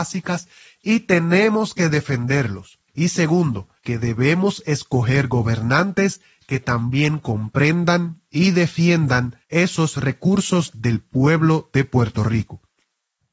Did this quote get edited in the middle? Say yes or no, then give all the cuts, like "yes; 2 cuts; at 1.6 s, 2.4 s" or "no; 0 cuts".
yes; 3 cuts; at 2.9 s, 3.8 s, 9.4 s